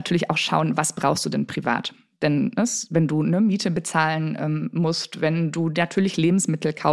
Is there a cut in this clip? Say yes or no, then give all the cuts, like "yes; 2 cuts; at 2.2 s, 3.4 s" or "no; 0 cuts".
no; 0 cuts